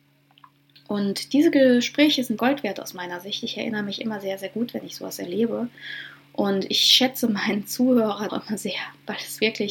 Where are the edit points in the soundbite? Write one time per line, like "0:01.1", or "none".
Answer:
0:02.4
0:08.3